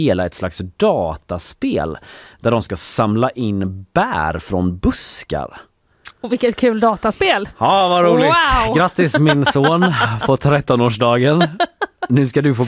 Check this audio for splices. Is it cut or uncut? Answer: uncut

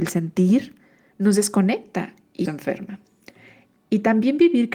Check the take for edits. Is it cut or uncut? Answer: cut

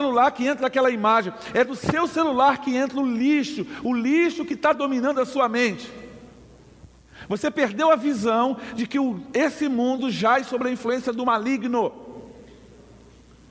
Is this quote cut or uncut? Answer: uncut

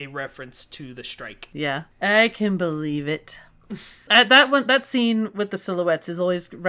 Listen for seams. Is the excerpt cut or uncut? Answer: uncut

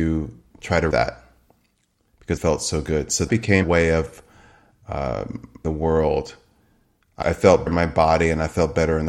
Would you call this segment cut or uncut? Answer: cut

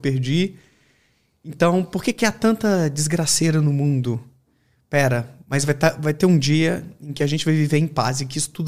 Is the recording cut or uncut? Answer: uncut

